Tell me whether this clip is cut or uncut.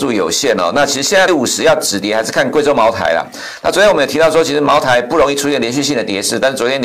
cut